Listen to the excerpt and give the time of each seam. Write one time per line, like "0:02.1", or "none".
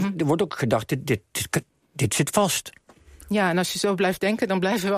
none